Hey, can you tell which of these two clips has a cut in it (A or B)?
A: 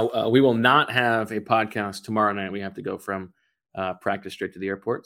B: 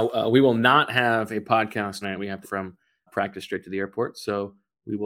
B